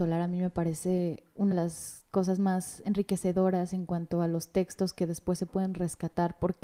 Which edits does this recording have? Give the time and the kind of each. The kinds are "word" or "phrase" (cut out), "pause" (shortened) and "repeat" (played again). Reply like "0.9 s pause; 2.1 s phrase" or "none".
1.5 s word